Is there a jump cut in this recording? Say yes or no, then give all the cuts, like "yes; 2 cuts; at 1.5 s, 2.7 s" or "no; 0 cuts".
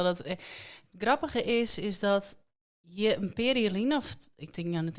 no; 0 cuts